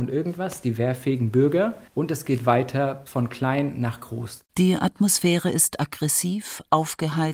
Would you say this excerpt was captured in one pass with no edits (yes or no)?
no